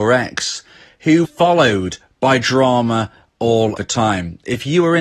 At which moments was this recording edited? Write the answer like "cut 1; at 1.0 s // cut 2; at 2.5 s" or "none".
cut 1; at 1.2 s // cut 2; at 3.8 s

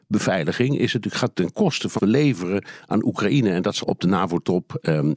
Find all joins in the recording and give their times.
cut 1; at 1.3 s // cut 2; at 2.0 s // cut 3; at 3.8 s

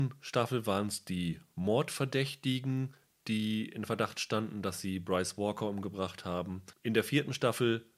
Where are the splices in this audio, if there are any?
none

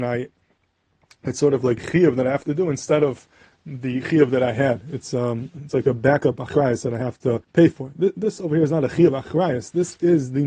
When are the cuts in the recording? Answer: cut 1; at 1.8 s // cut 2; at 7.4 s

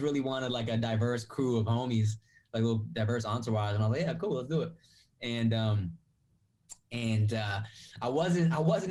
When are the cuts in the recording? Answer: none

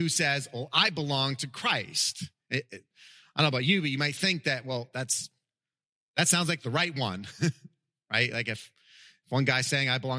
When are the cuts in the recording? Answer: none

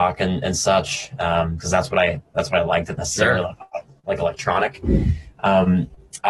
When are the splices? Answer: cut 1; at 1.6 s // cut 2; at 3.0 s

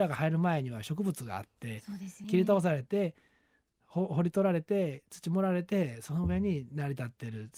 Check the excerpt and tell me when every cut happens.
cut 1; at 2.2 s

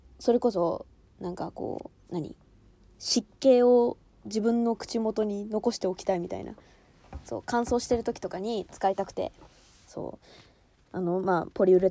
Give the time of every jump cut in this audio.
cut 1; at 2.0 s

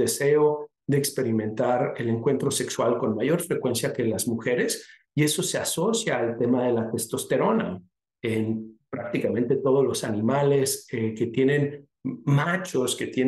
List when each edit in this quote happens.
none

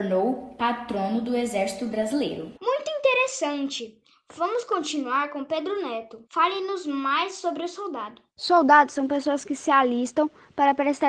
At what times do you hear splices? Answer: cut 1; at 2.6 s // cut 2; at 6.3 s // cut 3; at 8.3 s

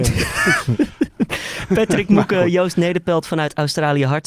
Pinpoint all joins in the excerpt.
none

